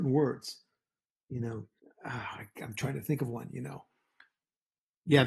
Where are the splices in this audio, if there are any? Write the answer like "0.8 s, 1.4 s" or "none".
1.8 s